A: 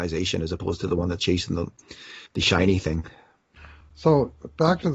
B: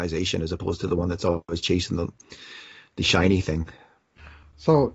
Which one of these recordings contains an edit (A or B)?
A